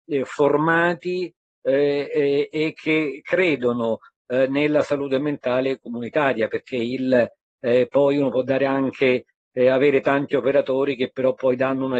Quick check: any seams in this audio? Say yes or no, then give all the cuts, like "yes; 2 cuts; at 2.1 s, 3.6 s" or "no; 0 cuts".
no; 0 cuts